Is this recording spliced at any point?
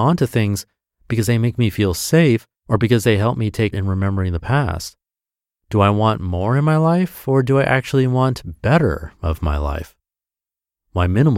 yes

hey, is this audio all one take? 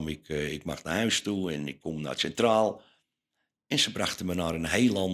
no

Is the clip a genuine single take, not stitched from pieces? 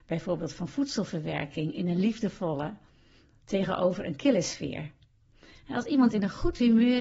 yes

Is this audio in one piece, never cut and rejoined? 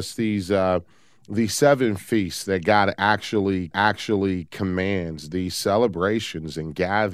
no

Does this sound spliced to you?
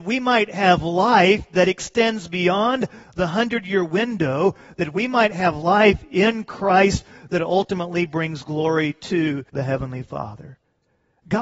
yes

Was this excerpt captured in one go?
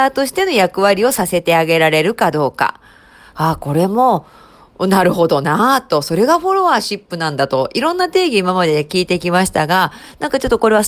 yes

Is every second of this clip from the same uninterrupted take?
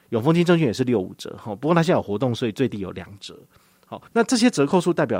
no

